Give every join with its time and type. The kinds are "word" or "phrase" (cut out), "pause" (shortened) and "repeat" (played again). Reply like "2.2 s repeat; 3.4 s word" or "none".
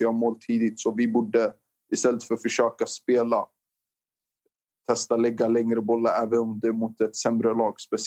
none